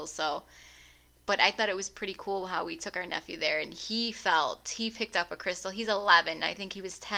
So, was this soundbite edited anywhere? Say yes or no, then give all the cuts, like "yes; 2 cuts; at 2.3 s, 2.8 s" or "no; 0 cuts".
no; 0 cuts